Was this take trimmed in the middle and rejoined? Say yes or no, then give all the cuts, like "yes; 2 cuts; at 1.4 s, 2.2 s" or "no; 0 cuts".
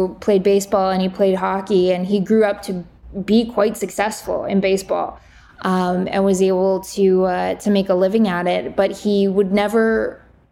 no; 0 cuts